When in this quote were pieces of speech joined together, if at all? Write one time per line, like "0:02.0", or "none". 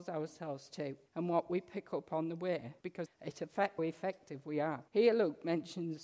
0:01.1
0:02.8
0:03.8
0:04.9

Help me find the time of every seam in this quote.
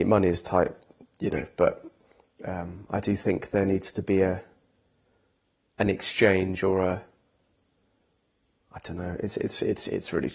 none

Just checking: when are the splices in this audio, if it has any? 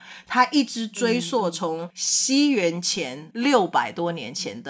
0:03.3

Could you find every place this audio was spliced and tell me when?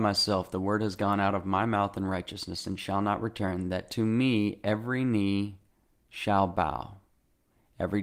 none

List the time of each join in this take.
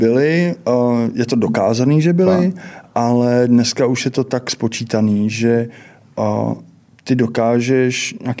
0:06.8

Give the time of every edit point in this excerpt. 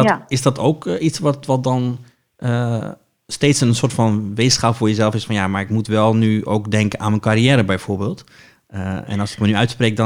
none

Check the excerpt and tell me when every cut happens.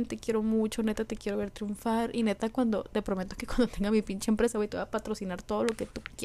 none

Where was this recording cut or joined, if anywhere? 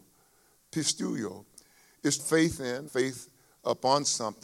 0:02.2
0:02.9

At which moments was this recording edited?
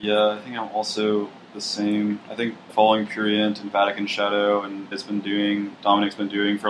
0:02.7
0:04.9

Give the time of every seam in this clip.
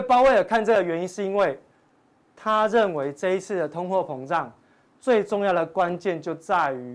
none

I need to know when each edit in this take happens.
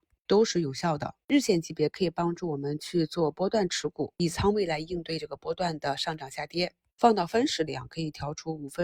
0:04.1

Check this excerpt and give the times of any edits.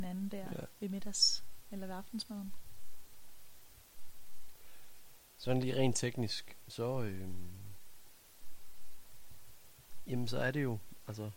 none

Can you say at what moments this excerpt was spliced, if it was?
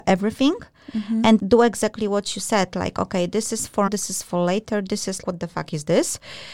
0:01.4
0:03.9
0:05.2

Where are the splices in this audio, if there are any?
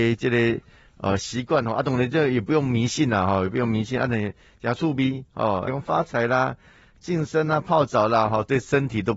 0:05.7

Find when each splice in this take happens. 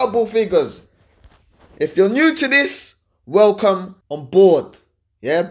0:04.0

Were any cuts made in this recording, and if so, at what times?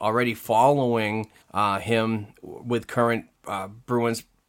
0:01.4
0:03.3

